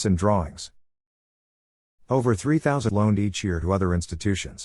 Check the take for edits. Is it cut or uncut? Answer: cut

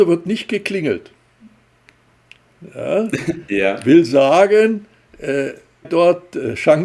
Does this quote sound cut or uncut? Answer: cut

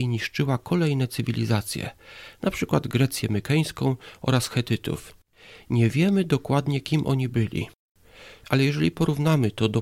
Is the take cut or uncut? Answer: uncut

